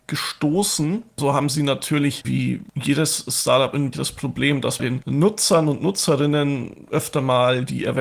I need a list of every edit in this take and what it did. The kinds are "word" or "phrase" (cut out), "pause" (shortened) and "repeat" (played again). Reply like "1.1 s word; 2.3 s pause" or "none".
2.2 s word; 3.9 s word; 4.8 s word